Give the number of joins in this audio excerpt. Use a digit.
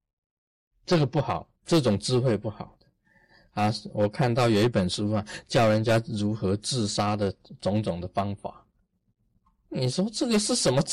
1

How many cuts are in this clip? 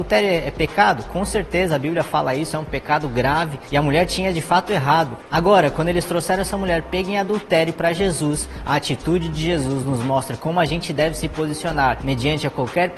0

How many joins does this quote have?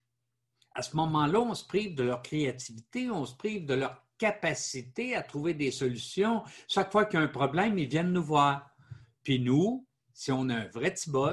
0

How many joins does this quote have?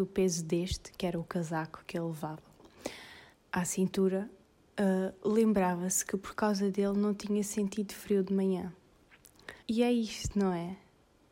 3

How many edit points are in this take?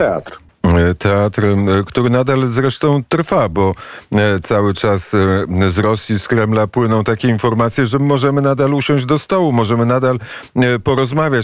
0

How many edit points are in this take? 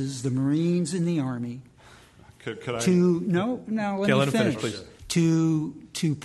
1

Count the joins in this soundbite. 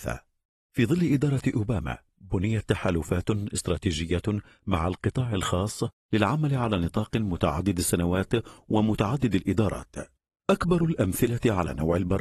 0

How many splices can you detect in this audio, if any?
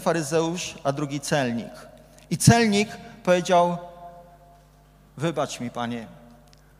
0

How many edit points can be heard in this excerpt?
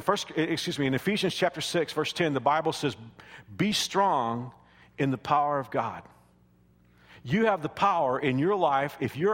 0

